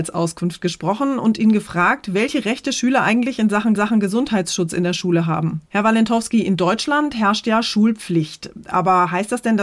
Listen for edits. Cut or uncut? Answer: cut